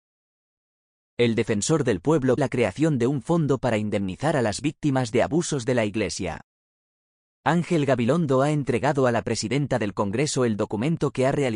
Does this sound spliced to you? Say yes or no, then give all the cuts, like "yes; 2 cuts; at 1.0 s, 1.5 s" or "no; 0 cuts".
yes; 1 cut; at 2.4 s